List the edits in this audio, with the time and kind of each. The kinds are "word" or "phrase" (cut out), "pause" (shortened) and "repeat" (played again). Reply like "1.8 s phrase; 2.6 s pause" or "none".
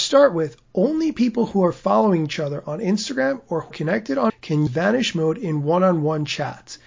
3.7 s word; 4.3 s word; 4.7 s word